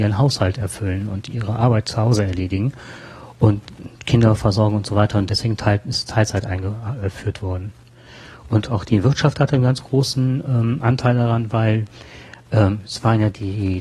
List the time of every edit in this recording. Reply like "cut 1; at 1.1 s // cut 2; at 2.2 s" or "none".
none